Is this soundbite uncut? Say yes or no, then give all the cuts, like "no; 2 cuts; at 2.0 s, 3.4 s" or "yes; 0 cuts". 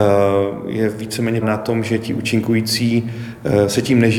no; 1 cut; at 1.4 s